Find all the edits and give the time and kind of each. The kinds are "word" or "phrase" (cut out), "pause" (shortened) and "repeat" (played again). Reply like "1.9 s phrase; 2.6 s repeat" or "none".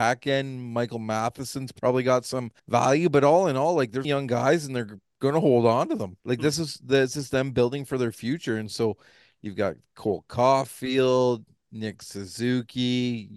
2.6 s pause; 4.0 s phrase; 6.2 s pause